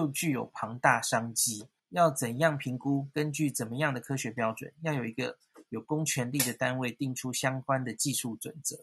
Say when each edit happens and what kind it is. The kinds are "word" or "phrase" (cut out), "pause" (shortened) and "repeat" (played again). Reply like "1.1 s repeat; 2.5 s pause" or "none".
1.8 s pause